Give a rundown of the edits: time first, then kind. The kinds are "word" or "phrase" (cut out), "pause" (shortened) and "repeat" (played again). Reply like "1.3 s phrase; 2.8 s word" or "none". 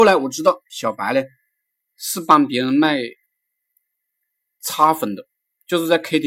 none

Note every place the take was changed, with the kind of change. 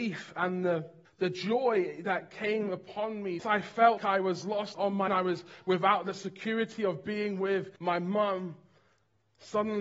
1.1 s pause; 3.4 s phrase; 4.0 s word; 4.7 s phrase; 5.1 s word; 7.8 s pause

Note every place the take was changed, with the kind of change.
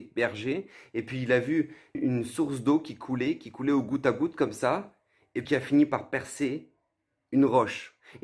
1.9 s word; 5.4 s word

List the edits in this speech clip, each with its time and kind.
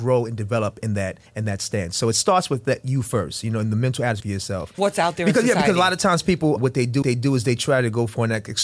1.3 s pause; 4.2 s phrase; 4.8 s phrase; 6.6 s word; 7.0 s repeat

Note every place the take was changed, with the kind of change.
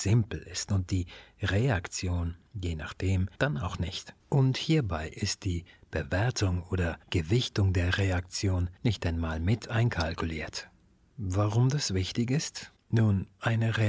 3.3 s pause; 4.2 s pause; 7.0 s pause; 8.8 s pause; 10.9 s pause

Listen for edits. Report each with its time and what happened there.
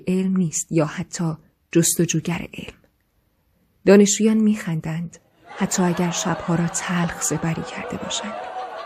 none

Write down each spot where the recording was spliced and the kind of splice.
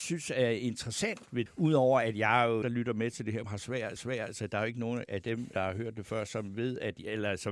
1.5 s word; 2.6 s phrase; 3.4 s word; 4.0 s repeat; 5.5 s word

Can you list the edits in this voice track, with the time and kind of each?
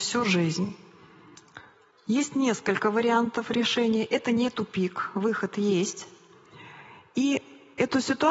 none

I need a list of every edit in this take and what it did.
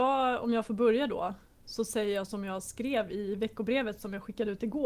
none

